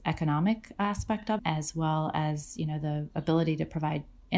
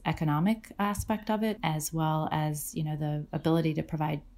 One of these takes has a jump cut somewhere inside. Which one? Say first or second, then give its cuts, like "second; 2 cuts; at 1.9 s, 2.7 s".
first; 1 cut; at 1.4 s